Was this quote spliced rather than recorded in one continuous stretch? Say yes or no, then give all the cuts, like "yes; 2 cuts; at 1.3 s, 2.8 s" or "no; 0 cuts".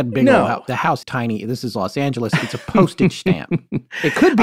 yes; 1 cut; at 1.0 s